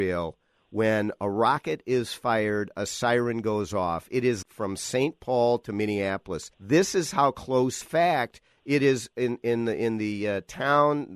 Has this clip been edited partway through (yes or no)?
yes